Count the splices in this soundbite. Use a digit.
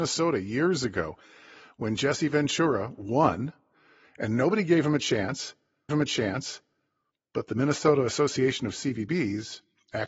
1